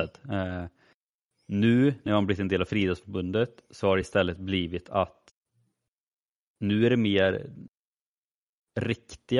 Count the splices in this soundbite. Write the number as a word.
zero